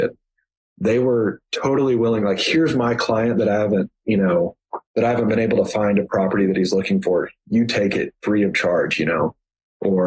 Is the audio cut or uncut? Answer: cut